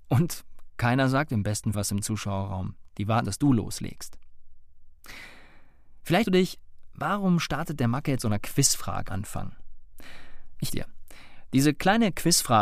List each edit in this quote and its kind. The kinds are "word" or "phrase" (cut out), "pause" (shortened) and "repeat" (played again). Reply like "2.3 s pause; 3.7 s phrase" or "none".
1.7 s word; 3.2 s word; 6.2 s word; 8.2 s word; 9.1 s word; 10.7 s word